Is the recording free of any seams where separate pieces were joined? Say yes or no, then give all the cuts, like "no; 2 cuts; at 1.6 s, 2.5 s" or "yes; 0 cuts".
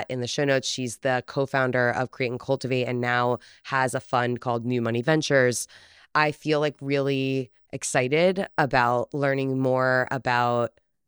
yes; 0 cuts